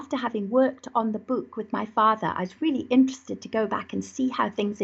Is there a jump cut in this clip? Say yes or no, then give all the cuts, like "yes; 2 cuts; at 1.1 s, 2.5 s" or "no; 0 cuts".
no; 0 cuts